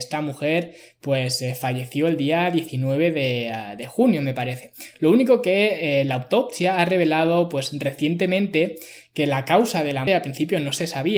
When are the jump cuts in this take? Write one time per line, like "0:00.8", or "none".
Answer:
0:10.1